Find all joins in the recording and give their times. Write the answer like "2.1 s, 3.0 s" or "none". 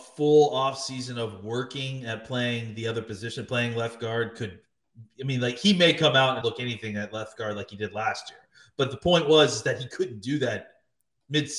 6.4 s